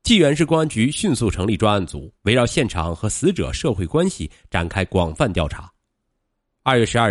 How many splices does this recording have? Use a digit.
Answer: 1